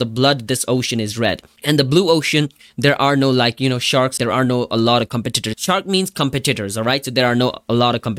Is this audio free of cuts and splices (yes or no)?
no